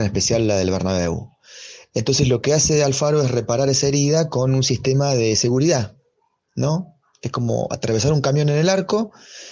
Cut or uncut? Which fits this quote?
uncut